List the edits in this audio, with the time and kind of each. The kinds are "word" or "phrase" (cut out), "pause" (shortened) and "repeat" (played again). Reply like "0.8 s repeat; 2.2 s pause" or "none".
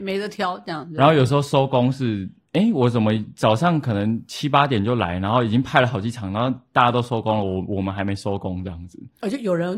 none